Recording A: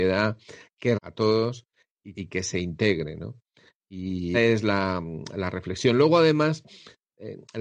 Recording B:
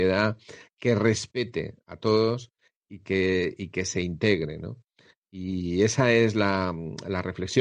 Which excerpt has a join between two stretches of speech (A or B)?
A